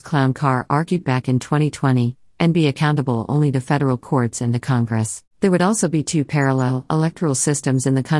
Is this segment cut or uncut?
cut